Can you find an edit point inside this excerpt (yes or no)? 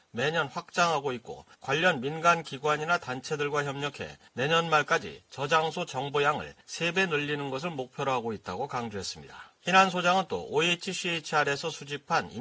yes